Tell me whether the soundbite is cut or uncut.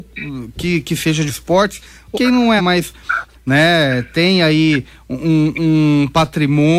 cut